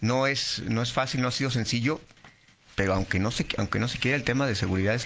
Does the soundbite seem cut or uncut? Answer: uncut